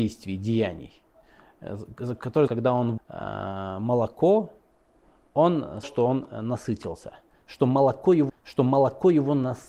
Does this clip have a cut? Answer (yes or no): yes